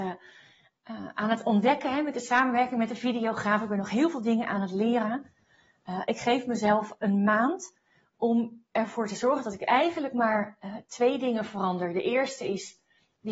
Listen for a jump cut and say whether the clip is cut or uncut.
uncut